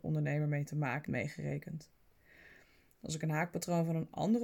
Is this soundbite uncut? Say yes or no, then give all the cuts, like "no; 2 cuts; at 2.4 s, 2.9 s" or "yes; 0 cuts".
no; 1 cut; at 1.0 s